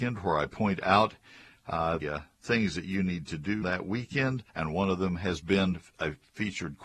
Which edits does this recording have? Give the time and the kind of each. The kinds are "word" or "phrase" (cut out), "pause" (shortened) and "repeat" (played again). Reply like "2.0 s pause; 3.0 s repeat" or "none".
2.0 s word; 3.6 s word; 4.5 s pause